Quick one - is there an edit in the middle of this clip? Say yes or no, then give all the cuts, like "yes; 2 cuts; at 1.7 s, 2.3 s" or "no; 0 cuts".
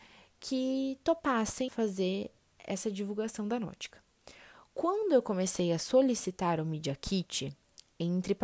yes; 1 cut; at 1.7 s